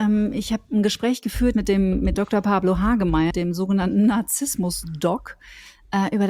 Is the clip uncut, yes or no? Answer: no